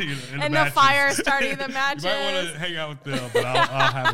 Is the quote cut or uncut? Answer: uncut